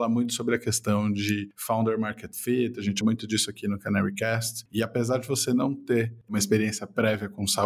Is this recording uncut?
no; 1 cut; at 3.0 s

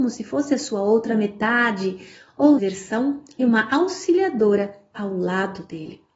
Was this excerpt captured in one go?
no; 3 cuts; at 2.6 s, 3.4 s, 4.9 s

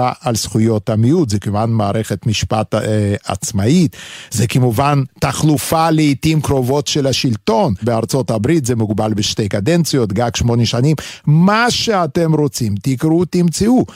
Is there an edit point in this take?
yes; 1 cut; at 7.8 s

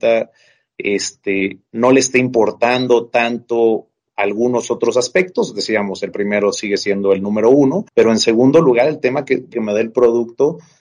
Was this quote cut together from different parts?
yes; 3 cuts; at 6.1 s, 7.9 s, 9.5 s

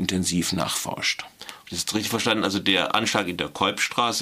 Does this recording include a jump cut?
no; 0 cuts

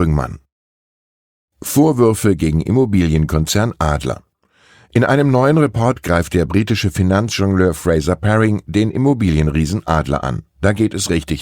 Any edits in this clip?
no; 0 cuts

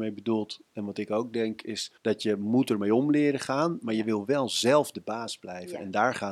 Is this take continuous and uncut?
no; 1 cut; at 2.0 s

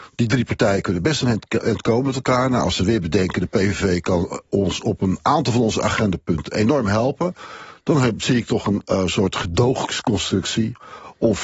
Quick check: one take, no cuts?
yes; 0 cuts

